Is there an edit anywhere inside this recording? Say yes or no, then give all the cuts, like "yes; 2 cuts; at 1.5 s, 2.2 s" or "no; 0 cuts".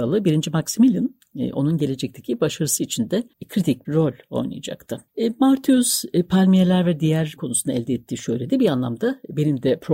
yes; 4 cuts; at 3.3 s, 3.8 s, 5.1 s, 7.4 s